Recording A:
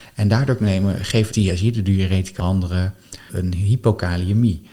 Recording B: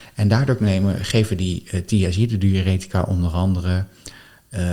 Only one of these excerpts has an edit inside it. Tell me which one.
A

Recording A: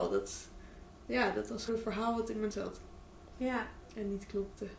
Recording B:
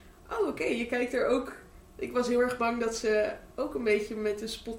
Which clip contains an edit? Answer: A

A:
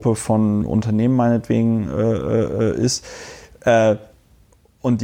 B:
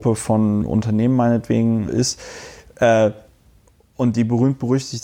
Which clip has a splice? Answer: B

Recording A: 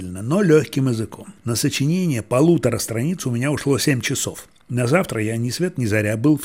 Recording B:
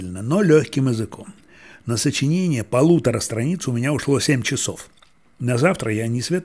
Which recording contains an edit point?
A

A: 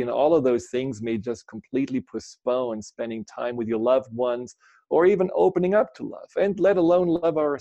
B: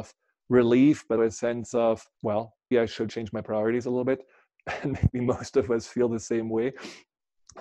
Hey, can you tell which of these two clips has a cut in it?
B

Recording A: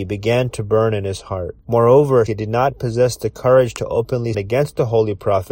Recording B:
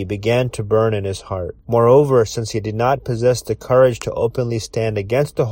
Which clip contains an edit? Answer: A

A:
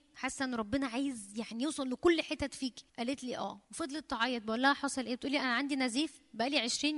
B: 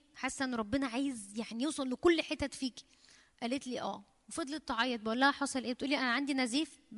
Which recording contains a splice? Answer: A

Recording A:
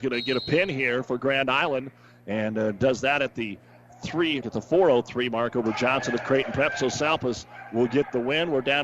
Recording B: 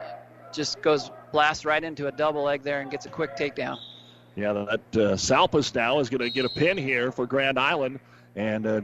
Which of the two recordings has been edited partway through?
A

